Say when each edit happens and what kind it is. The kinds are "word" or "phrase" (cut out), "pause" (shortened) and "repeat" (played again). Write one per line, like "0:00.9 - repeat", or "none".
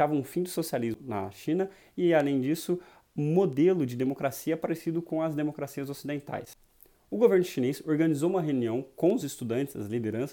none